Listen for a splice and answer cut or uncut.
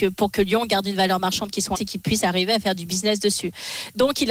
cut